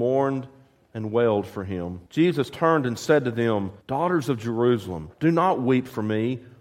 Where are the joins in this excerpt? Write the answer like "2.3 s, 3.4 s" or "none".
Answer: 2.1 s, 3.8 s, 5.1 s